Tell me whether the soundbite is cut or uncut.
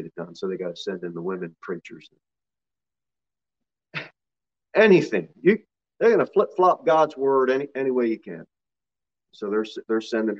uncut